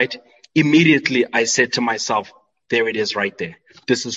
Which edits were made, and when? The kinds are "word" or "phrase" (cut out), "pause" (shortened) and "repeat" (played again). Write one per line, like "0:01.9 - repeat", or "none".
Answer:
none